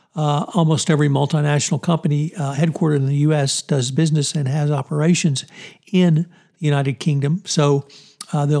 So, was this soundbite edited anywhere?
no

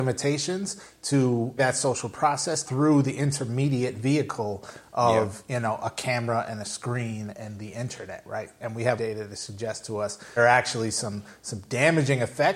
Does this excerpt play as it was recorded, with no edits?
no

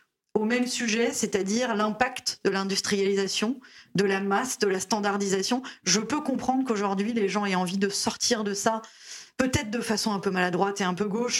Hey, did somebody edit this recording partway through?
no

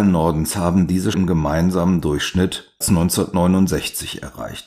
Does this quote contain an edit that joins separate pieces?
yes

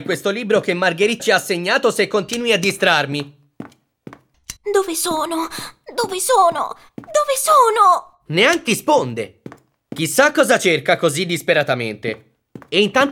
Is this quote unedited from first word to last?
no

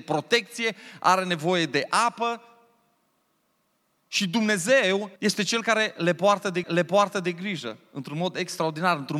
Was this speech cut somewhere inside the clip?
yes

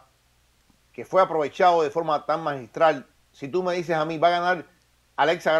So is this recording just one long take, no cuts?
no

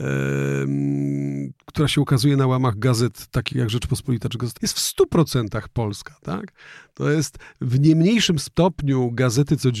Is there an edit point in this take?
yes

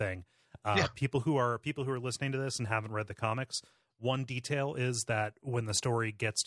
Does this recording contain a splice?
no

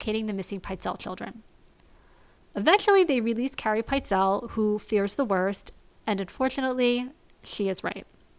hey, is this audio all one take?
yes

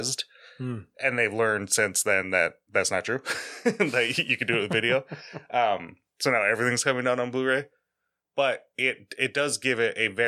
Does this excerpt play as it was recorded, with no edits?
yes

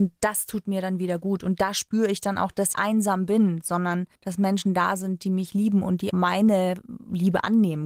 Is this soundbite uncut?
no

